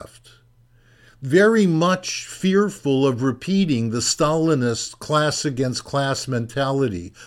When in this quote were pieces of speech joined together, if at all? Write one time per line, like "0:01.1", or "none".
none